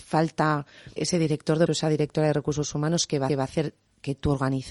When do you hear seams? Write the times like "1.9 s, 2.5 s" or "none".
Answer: 1.0 s, 1.7 s, 3.3 s